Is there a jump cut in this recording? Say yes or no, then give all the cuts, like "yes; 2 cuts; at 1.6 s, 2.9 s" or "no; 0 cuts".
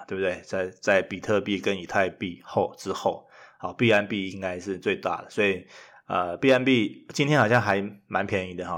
no; 0 cuts